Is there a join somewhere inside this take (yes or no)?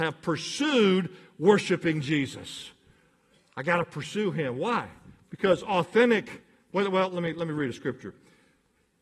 no